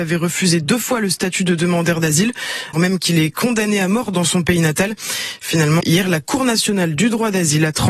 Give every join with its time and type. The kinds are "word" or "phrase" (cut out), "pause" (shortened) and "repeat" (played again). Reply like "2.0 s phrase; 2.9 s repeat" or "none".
2.7 s word; 5.8 s word